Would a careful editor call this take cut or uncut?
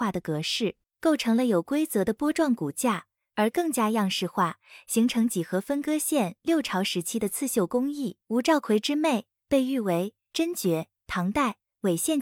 cut